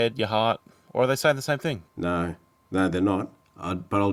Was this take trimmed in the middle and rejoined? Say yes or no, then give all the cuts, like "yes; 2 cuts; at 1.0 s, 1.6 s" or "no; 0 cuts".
yes; 1 cut; at 1.9 s